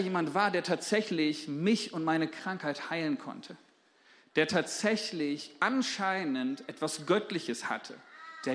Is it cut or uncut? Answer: uncut